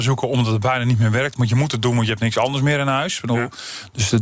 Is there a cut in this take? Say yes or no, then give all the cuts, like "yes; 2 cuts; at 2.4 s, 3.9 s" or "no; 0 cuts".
no; 0 cuts